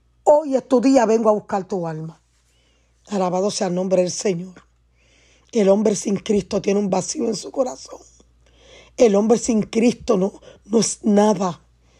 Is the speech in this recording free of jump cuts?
yes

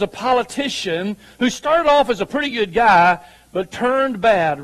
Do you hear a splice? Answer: no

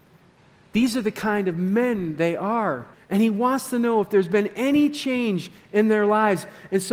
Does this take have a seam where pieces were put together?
yes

